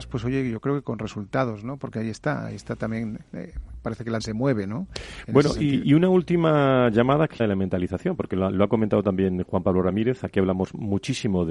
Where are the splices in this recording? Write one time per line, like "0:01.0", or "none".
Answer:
0:04.2
0:05.8
0:07.4